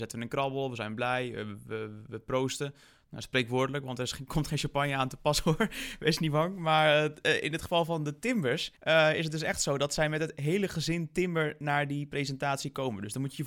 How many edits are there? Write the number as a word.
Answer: one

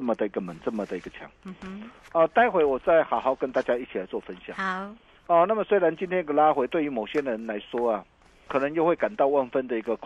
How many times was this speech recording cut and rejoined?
one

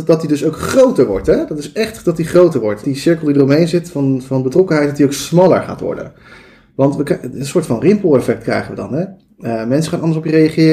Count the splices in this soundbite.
one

